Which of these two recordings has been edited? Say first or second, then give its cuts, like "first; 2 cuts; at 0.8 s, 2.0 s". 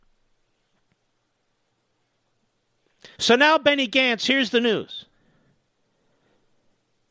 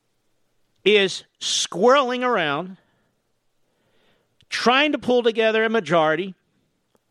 first; 1 cut; at 3.1 s